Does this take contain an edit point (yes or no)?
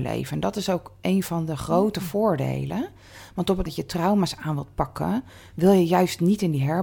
yes